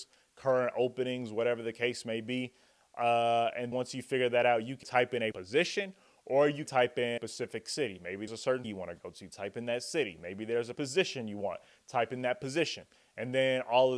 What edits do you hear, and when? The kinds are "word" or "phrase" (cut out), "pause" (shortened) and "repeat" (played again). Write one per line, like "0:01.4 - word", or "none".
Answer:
0:03.7 - word
0:04.8 - word
0:05.3 - word
0:06.7 - word
0:07.2 - word
0:08.3 - word
0:08.6 - word
0:10.8 - word